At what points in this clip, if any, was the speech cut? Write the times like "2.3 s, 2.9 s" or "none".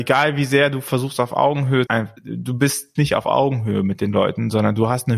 1.9 s, 2.2 s, 3.0 s